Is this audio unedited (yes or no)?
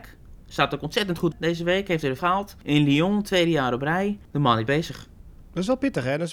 no